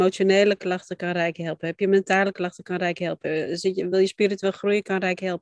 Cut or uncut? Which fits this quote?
uncut